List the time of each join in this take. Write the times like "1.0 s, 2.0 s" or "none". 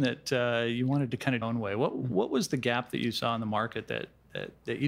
1.4 s